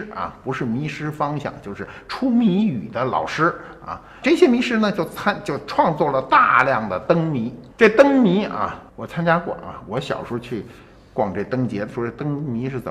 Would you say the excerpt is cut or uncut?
cut